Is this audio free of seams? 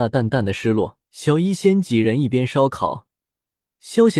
no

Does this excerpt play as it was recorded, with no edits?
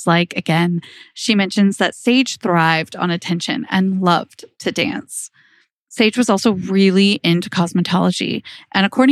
yes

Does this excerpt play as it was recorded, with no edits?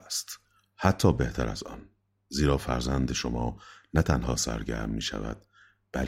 yes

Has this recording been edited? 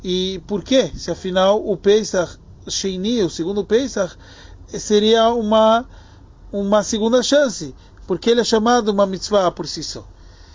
yes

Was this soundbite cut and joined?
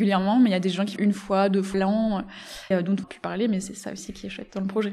yes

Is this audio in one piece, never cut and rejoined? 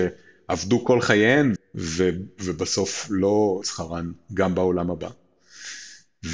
no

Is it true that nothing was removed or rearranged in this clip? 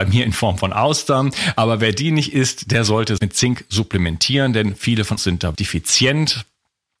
no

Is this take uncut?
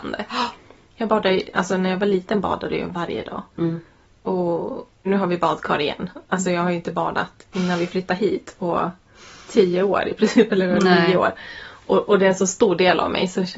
no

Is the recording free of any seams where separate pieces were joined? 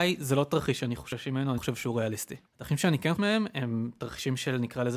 no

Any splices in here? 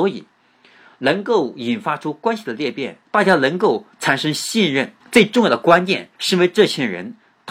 yes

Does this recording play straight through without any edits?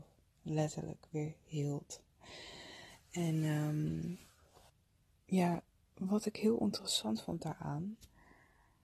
no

